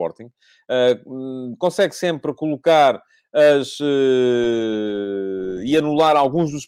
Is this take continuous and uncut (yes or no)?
yes